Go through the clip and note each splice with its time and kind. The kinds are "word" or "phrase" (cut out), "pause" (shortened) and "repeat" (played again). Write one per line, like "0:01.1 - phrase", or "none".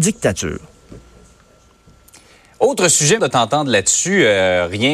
0:03.2 - phrase